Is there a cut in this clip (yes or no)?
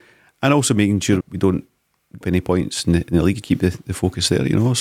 yes